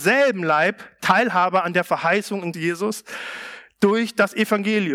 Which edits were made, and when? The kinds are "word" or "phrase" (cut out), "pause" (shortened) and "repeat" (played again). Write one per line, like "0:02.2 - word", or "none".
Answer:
0:02.5 - word